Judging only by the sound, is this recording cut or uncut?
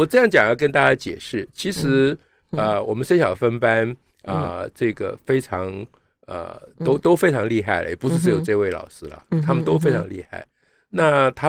uncut